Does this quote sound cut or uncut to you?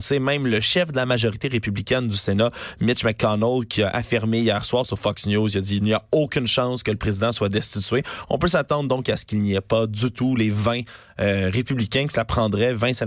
uncut